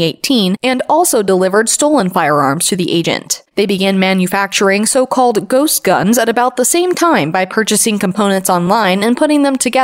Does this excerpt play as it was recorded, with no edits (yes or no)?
no